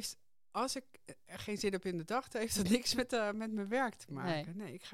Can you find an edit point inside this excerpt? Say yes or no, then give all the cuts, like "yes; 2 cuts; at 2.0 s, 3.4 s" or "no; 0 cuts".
no; 0 cuts